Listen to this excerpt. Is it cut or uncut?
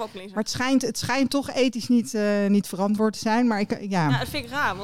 uncut